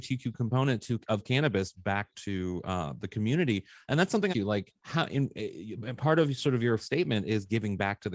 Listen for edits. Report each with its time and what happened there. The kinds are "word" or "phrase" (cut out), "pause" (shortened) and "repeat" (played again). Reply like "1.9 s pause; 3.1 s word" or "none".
2.1 s word; 4.3 s phrase; 4.8 s pause; 6.8 s word